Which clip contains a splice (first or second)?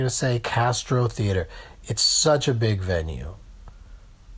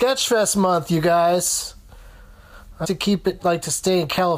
second